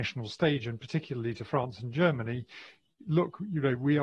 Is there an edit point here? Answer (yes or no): no